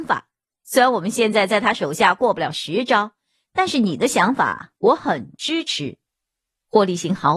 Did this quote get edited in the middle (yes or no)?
no